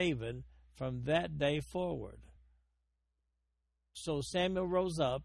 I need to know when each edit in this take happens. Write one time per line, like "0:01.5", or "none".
none